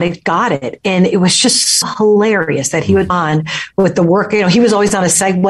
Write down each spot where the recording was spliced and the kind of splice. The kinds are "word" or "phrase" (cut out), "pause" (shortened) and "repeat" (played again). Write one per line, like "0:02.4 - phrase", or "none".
0:01.8 - word
0:03.1 - word